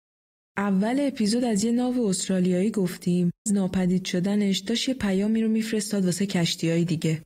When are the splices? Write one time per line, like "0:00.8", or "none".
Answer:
0:03.5